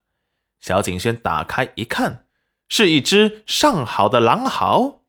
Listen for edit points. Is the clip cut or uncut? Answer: uncut